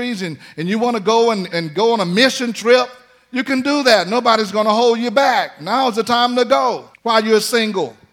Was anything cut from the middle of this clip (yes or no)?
yes